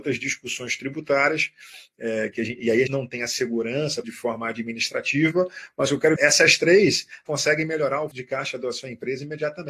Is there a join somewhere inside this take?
yes; 5 cuts; at 2.9 s, 4.0 s, 6.2 s, 7.3 s, 8.1 s

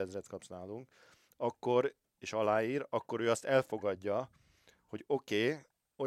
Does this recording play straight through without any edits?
yes; 0 cuts

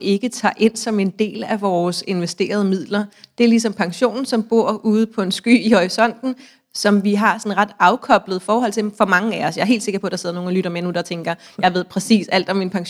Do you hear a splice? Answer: no; 0 cuts

